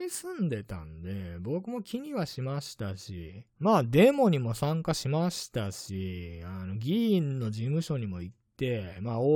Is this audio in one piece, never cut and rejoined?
no; 1 cut; at 3.5 s

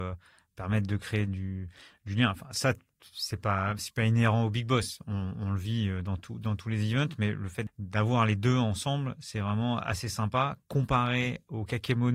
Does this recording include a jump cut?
no; 0 cuts

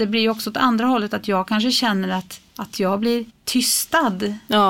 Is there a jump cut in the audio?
yes; 2 cuts; at 2.5 s, 3.3 s

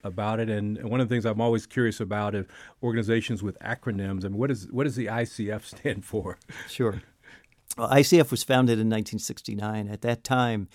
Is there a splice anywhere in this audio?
no; 0 cuts

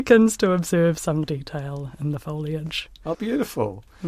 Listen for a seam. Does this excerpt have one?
yes; 2 cuts; at 1.2 s, 3.1 s

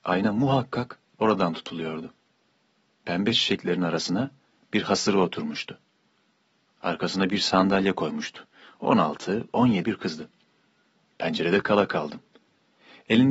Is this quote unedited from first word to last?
no; 2 cuts; at 3.3 s, 9.8 s

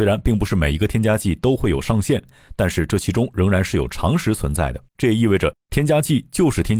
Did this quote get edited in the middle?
yes; 1 cut; at 4.9 s

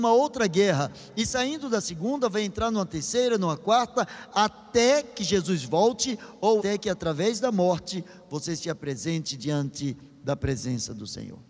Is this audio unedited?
no; 1 cut; at 6.6 s

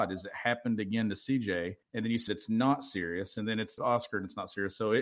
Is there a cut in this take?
yes; 3 cuts; at 1.8 s, 2.3 s, 3.8 s

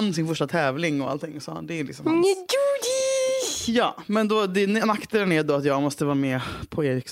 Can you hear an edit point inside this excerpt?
no; 0 cuts

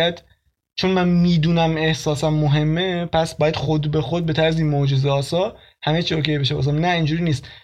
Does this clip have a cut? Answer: no; 0 cuts

